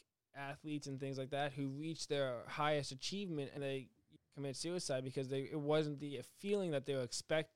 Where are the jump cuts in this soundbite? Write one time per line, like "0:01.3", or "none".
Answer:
0:03.6
0:04.2